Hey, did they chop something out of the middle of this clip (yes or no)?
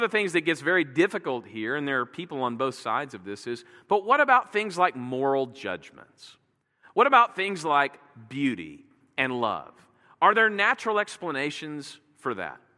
no